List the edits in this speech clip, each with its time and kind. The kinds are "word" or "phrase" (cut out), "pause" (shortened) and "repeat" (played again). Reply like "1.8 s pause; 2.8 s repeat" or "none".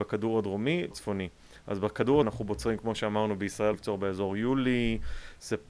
0.9 s word; 2.2 s word; 3.7 s word